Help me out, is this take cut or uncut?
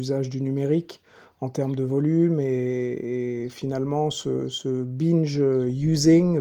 uncut